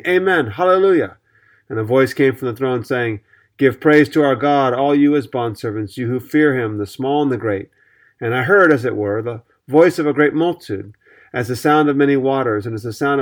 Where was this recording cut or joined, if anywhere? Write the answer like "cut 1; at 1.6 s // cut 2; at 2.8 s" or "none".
none

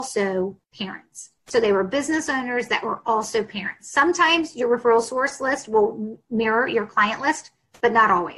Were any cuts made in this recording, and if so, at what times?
none

